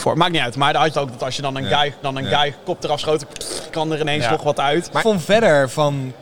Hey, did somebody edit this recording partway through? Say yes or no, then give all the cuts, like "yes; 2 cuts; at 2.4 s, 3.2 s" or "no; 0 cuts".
yes; 3 cuts; at 0.9 s, 2.0 s, 5.0 s